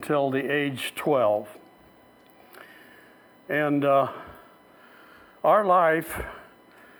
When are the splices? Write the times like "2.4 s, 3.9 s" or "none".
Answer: none